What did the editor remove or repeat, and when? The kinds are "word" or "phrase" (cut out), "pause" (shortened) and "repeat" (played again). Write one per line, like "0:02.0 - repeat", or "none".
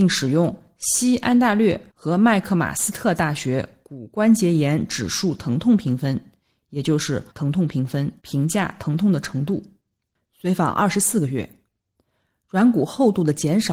0:01.9 - pause
0:07.3 - word
0:08.2 - pause